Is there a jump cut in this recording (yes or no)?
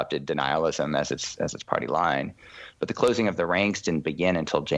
no